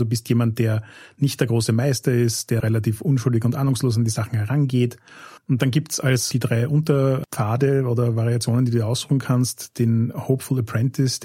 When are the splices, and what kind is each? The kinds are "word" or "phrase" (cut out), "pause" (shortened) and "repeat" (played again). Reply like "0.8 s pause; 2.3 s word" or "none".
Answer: 2.6 s word; 5.4 s pause